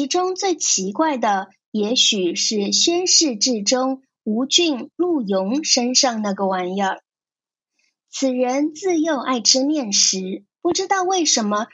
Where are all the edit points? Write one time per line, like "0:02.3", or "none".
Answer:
0:10.5